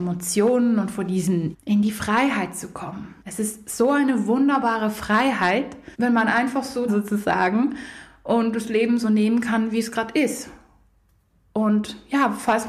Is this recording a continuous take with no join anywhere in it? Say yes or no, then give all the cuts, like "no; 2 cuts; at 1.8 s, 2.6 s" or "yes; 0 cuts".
no; 4 cuts; at 1.5 s, 3.2 s, 5.9 s, 6.9 s